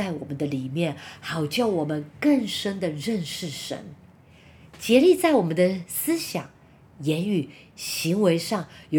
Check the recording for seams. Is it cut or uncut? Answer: uncut